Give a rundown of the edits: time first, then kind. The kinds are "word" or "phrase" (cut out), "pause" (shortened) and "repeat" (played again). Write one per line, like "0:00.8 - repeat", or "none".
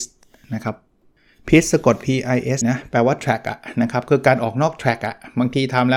0:02.6 - phrase